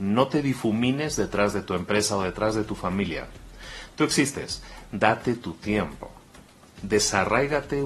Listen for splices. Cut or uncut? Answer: uncut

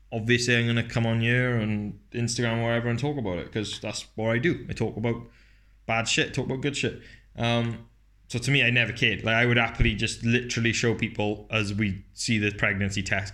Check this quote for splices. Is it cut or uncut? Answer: uncut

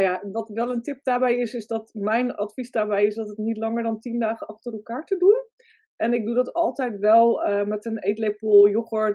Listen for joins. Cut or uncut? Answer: uncut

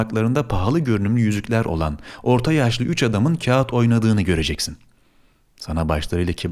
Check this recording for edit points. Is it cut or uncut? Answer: uncut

